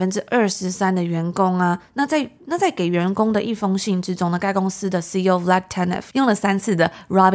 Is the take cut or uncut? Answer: uncut